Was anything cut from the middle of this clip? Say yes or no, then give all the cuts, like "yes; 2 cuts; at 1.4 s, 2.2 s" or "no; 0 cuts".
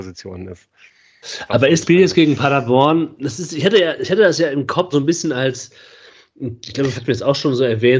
yes; 3 cuts; at 1.8 s, 4.9 s, 6.9 s